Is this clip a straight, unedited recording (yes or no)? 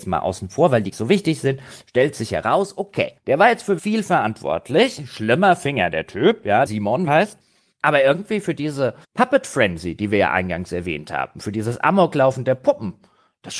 no